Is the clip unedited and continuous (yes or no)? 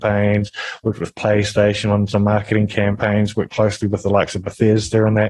yes